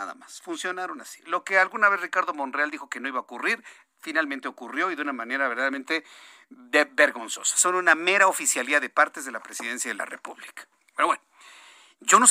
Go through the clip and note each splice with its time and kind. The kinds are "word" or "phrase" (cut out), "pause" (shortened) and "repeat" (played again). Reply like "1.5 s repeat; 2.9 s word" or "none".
none